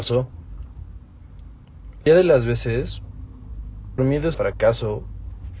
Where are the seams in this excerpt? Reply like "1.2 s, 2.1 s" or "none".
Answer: 2.1 s, 4.0 s, 4.3 s